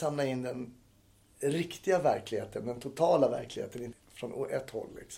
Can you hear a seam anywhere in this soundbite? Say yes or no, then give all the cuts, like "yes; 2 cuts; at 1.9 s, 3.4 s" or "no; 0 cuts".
yes; 1 cut; at 3.9 s